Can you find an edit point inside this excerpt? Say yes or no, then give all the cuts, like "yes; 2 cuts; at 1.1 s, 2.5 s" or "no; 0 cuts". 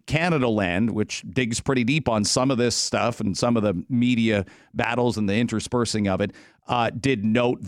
no; 0 cuts